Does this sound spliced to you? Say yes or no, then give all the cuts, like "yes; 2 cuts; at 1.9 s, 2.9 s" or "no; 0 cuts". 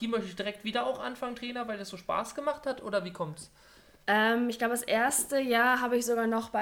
no; 0 cuts